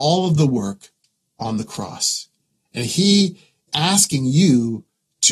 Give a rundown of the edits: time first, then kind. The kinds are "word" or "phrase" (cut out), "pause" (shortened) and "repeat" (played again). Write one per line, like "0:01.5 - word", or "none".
0:03.7 - word